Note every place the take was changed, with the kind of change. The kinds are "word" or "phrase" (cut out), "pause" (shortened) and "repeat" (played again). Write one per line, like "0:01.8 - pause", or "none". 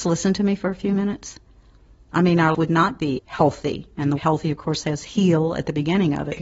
0:02.5 - word
0:03.2 - word
0:04.2 - word